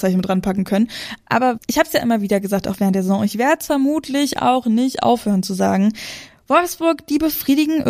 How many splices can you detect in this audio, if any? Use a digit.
1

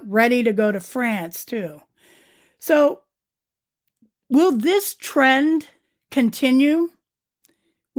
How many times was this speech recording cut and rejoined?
1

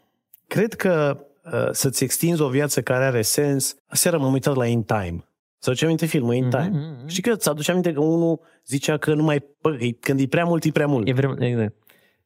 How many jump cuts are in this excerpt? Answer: 4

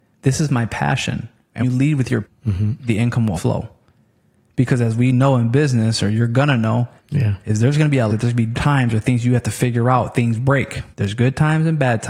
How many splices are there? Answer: 7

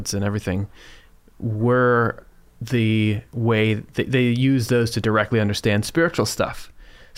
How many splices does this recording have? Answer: 1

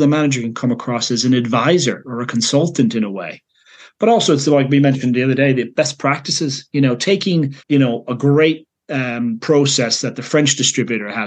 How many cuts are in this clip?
1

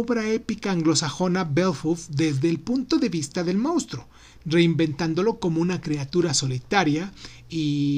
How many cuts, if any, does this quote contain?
0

